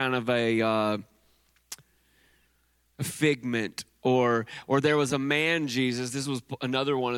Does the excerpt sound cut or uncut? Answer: uncut